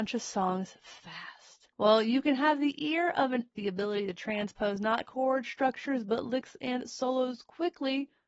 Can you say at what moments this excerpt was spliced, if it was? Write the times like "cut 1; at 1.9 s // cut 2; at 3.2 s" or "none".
cut 1; at 1.7 s // cut 2; at 3.6 s // cut 3; at 5.1 s